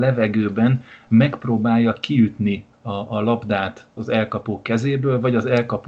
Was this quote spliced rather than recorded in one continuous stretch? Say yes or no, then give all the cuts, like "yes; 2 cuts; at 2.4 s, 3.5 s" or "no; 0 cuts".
yes; 2 cuts; at 2.7 s, 4.0 s